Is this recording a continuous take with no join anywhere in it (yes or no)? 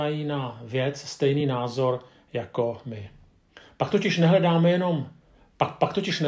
yes